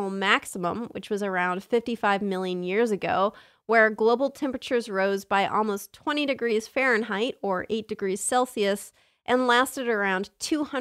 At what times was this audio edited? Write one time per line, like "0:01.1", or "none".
none